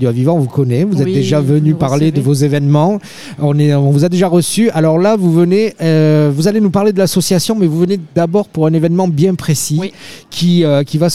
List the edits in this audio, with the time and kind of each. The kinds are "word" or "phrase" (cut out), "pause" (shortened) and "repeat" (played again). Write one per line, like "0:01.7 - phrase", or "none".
0:08.1 - pause

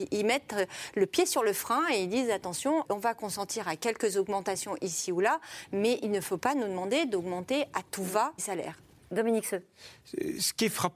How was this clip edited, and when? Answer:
0:02.8 - word
0:08.4 - word

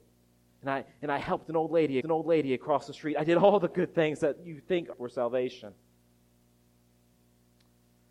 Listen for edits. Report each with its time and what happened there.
0:02.0 - repeat
0:04.9 - word

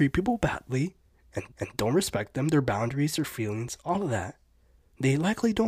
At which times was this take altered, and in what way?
0:01.5 - repeat

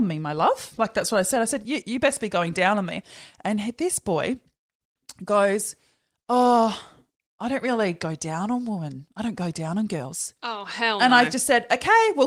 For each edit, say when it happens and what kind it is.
0:10.4 - pause

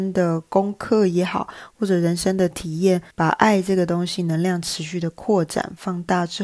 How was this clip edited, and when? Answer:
0:03.1 - pause

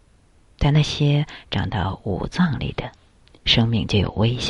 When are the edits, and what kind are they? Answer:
0:03.2 - pause

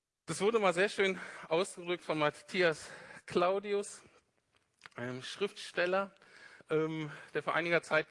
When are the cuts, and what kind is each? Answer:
0:06.6 - pause

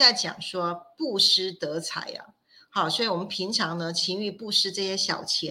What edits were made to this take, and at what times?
none

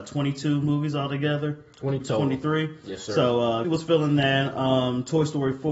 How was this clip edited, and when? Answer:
0:02.0 - word
0:03.6 - word

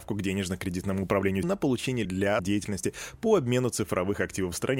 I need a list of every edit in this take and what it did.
0:01.4 - word
0:02.0 - word
0:02.4 - word

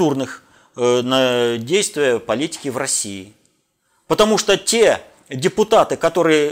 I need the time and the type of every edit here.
none

